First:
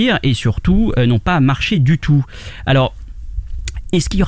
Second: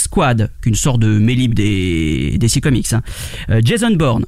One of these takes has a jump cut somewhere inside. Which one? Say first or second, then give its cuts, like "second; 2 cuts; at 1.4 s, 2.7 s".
second; 1 cut; at 1.5 s